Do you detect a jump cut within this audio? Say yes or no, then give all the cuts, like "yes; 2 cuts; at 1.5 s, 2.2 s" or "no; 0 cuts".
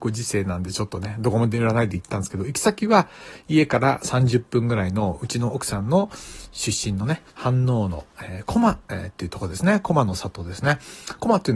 yes; 2 cuts; at 7.3 s, 8.8 s